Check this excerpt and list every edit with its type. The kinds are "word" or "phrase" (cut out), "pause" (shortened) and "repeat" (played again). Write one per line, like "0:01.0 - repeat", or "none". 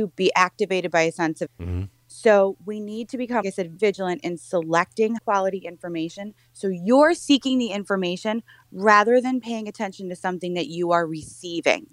0:01.5 - word
0:03.4 - word
0:03.8 - word
0:05.2 - word